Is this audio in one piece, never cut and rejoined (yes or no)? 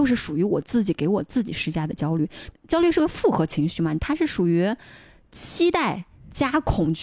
yes